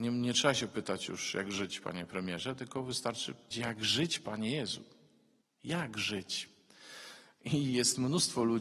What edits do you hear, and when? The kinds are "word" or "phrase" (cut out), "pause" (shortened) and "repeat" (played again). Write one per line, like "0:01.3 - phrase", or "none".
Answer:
0:03.5 - word
0:05.4 - pause

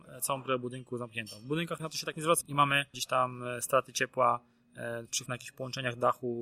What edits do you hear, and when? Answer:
0:01.8 - word
0:02.4 - word
0:02.9 - word
0:05.3 - word

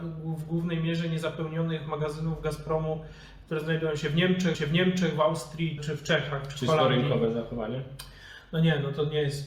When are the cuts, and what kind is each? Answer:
0:04.5 - repeat
0:05.8 - word

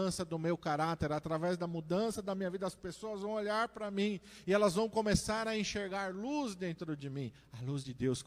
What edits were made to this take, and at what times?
none

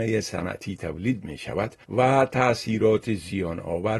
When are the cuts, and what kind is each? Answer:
0:01.8 - pause

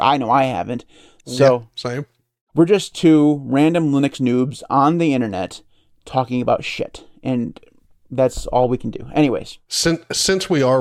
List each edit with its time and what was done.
none

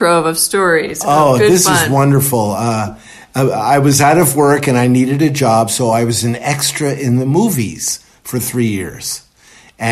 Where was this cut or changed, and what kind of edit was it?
none

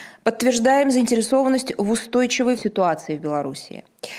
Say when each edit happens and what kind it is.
0:02.6 - word

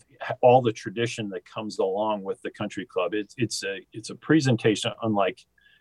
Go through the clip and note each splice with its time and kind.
0:03.8 - pause

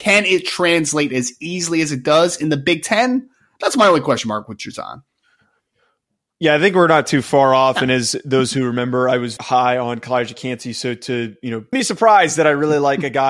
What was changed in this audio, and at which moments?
0:09.4 - word
0:11.7 - word

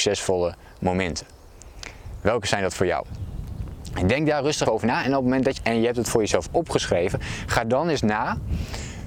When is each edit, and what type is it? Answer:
0:04.7 - word
0:05.6 - phrase

